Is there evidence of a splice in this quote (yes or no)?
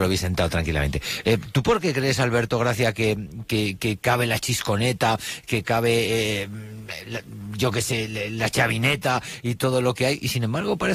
yes